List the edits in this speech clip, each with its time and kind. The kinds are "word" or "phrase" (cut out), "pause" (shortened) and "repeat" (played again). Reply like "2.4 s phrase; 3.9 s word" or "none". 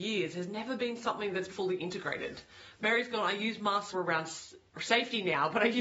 1.5 s word; 3.9 s word